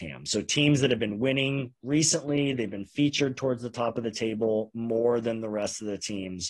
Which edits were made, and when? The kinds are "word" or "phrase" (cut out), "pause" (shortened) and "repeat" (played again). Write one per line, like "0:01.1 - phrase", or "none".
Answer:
none